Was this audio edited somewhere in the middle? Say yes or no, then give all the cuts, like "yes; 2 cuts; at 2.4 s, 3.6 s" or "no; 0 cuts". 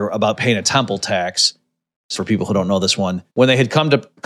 yes; 2 cuts; at 2.2 s, 3.3 s